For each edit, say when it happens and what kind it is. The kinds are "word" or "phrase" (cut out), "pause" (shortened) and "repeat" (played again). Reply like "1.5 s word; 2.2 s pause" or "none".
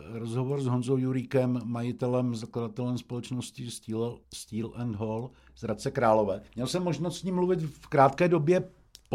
4.2 s pause; 6.5 s pause